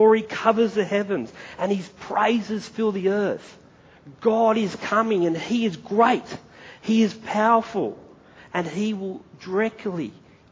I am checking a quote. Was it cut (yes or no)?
no